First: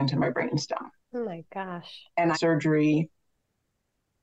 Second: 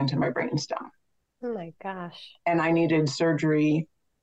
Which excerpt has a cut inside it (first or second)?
first